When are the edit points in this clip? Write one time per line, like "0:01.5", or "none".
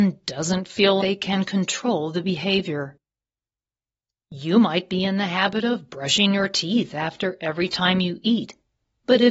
0:01.0